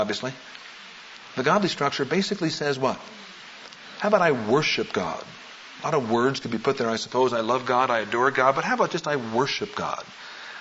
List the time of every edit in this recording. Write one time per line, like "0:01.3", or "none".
none